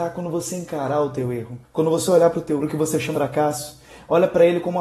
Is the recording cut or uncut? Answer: cut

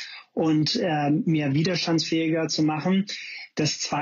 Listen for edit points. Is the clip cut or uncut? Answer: uncut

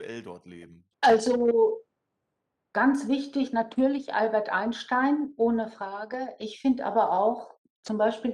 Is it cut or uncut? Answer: cut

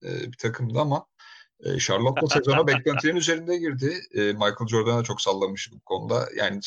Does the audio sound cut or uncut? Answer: uncut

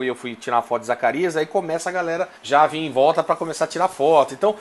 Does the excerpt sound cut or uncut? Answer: cut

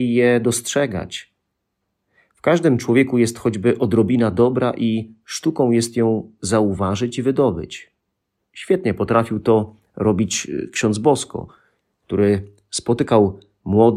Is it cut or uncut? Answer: uncut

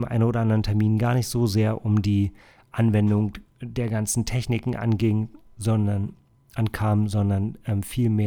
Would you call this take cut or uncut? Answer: uncut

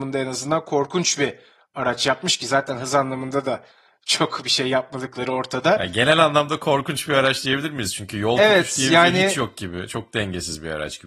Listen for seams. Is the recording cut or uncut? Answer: uncut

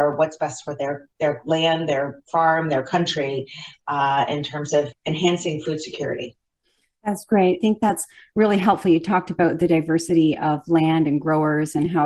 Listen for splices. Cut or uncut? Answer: uncut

